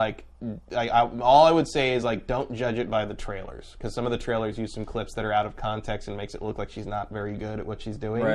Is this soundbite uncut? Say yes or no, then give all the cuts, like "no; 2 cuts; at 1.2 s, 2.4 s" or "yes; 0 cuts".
yes; 0 cuts